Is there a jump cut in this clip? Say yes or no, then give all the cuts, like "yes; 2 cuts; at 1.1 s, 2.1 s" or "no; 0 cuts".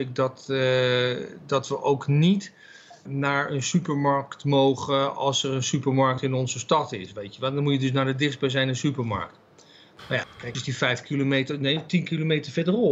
yes; 3 cuts; at 3.1 s, 10.2 s, 10.5 s